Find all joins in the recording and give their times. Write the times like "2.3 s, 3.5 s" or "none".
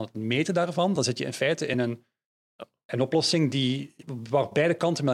none